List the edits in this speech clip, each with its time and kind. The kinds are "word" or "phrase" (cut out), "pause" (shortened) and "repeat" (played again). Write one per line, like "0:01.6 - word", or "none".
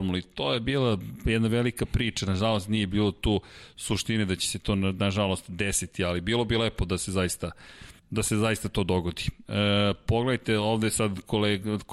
0:08.0 - pause